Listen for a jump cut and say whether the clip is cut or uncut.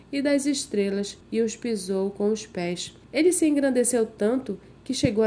cut